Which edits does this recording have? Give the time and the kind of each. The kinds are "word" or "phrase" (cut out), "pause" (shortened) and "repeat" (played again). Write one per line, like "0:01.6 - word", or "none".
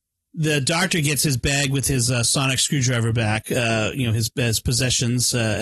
none